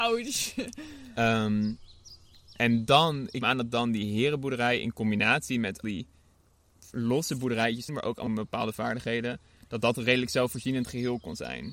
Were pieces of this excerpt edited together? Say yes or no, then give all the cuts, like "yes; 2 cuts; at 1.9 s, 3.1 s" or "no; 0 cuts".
yes; 4 cuts; at 3.4 s, 5.8 s, 7.9 s, 8.3 s